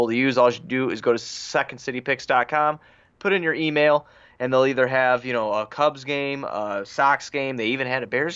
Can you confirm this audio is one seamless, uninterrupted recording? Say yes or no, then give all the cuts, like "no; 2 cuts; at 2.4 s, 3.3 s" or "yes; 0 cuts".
yes; 0 cuts